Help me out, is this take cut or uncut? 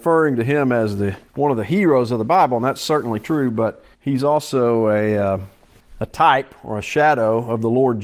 cut